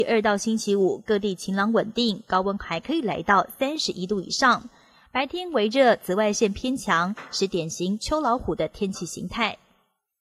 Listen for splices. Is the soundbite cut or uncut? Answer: uncut